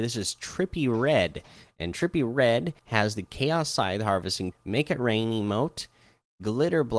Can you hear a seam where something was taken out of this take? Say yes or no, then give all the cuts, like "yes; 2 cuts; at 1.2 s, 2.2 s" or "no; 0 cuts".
yes; 2 cuts; at 2.8 s, 4.5 s